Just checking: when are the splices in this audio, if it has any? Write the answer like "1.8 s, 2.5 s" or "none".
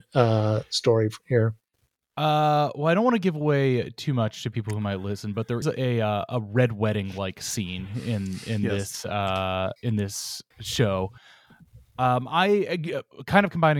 5.6 s, 9.8 s, 10.5 s